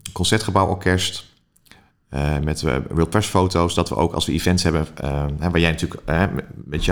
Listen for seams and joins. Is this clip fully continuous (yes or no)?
yes